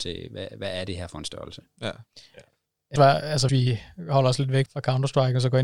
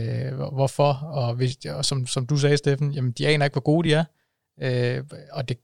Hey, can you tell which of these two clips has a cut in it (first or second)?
first